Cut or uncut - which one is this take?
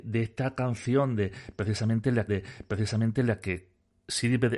cut